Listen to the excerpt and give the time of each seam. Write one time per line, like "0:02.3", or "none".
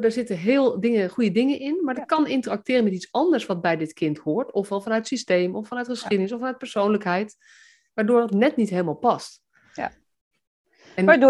none